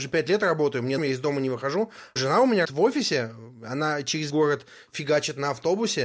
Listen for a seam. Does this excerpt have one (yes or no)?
yes